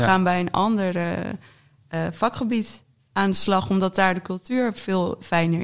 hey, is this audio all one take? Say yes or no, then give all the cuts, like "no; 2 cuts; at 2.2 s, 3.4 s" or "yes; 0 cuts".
yes; 0 cuts